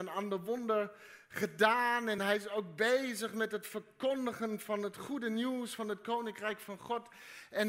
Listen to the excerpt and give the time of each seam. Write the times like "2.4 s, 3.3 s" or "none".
none